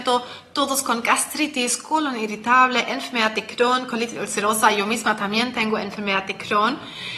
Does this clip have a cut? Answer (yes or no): no